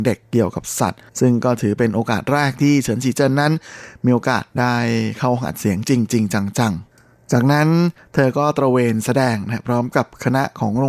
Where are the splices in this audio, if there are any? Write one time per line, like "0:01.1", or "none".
0:01.1